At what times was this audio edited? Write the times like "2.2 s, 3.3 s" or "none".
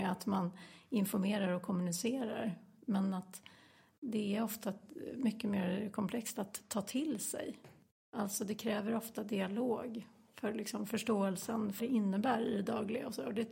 11.8 s

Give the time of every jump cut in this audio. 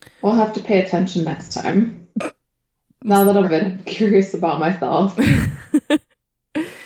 2.1 s, 3.4 s

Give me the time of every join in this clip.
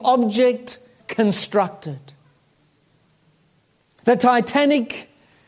1.0 s

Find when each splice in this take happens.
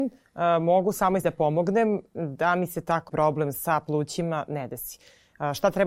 1.2 s, 3.1 s

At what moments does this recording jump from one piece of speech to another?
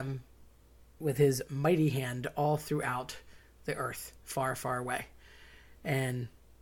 none

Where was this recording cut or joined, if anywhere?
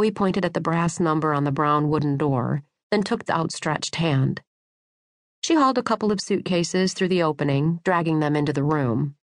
3.3 s

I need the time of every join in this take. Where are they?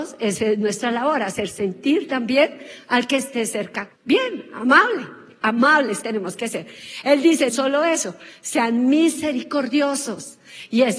3.9 s, 6.0 s, 7.5 s

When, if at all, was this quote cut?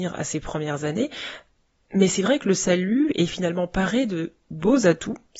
none

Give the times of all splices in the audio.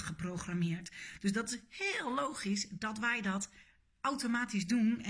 none

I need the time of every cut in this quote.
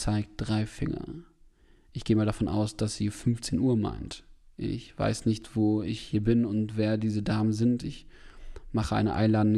none

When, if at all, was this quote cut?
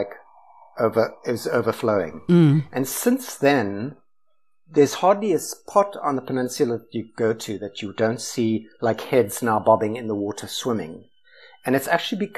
none

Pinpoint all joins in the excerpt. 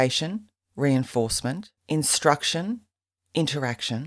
1.8 s

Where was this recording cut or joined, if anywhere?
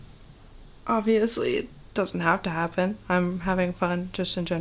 none

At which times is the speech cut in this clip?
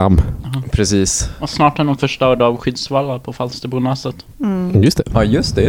2.0 s

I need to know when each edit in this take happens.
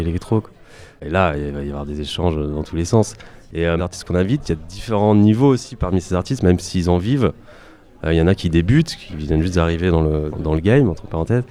3.8 s, 10.3 s

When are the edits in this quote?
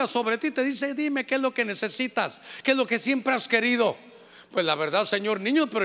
none

